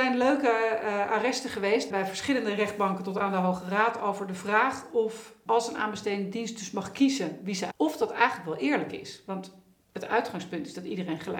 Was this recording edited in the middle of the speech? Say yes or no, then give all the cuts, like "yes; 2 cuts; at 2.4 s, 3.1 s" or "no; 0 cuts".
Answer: yes; 3 cuts; at 1.9 s, 5.5 s, 7.7 s